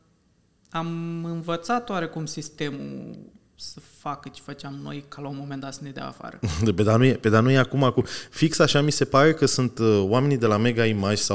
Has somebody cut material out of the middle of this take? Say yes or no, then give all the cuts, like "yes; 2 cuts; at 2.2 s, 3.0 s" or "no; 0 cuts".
no; 0 cuts